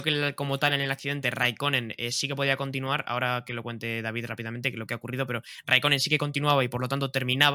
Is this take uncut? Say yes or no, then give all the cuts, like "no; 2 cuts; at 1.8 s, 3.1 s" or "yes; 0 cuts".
yes; 0 cuts